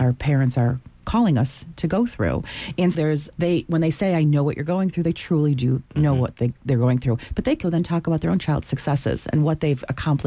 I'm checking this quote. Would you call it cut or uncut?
cut